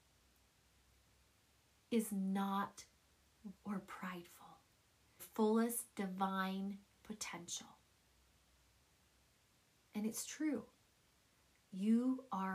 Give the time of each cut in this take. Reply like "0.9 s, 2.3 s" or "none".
3.5 s, 5.2 s